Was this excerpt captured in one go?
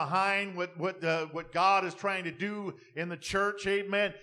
yes; 0 cuts

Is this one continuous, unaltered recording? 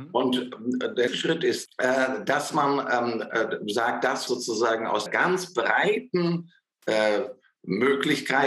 no; 4 cuts; at 1.1 s, 1.7 s, 4.3 s, 5.1 s

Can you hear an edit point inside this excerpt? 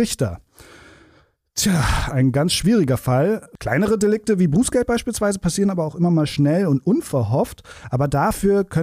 yes; 1 cut; at 6.3 s

